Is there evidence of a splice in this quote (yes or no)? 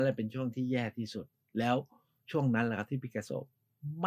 no